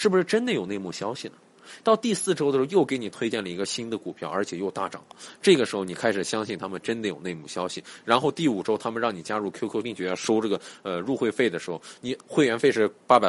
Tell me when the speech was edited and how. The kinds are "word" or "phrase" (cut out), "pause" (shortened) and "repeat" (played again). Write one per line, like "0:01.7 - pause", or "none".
0:09.8 - word

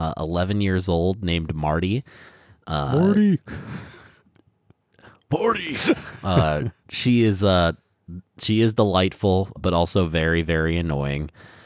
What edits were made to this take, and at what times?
0:09.6 - word

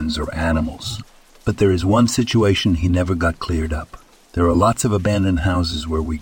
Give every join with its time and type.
none

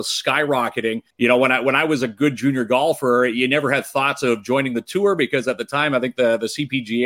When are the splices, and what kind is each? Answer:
0:01.1 - pause

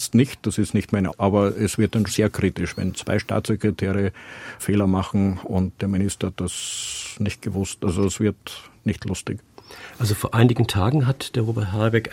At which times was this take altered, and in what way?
0:01.1 - word
0:02.1 - word
0:04.6 - word
0:05.8 - word

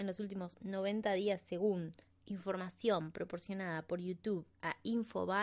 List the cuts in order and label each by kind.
0:02.0 - pause

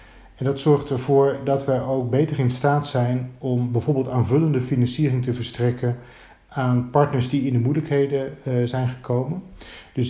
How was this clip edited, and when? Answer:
none

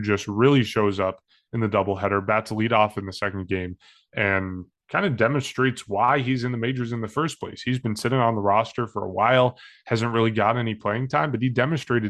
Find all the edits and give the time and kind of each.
none

